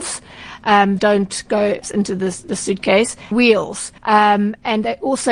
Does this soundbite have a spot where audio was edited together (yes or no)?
yes